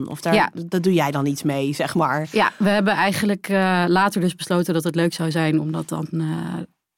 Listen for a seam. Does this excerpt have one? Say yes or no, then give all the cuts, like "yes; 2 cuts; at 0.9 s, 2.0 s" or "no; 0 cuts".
no; 0 cuts